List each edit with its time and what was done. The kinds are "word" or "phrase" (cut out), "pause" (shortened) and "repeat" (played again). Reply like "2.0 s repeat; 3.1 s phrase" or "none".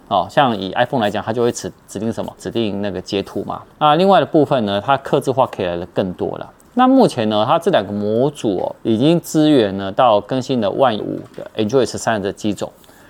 3.7 s pause; 8.8 s pause; 11.0 s word